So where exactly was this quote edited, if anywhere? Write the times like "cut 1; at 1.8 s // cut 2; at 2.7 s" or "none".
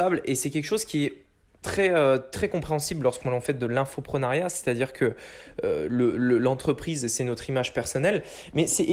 none